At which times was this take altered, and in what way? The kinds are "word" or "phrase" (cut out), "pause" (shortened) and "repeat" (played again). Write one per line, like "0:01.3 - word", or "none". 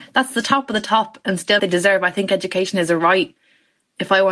0:01.6 - phrase